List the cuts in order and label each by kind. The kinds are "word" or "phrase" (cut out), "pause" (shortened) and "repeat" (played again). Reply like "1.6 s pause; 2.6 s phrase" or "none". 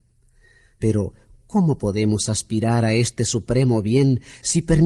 none